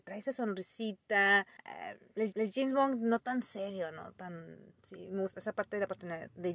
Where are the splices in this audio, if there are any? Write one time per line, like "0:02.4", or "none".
0:01.6
0:02.3
0:04.8
0:05.3

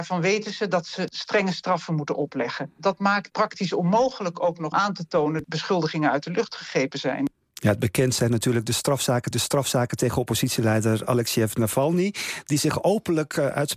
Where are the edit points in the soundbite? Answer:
0:03.3
0:04.7
0:05.4
0:09.3

